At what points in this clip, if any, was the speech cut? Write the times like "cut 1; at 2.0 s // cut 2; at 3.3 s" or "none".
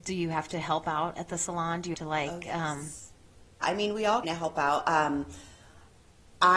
cut 1; at 1.9 s // cut 2; at 3.6 s // cut 3; at 4.2 s